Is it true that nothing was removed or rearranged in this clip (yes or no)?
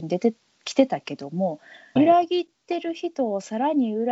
no